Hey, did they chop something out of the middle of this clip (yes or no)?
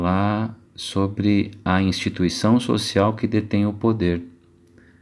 no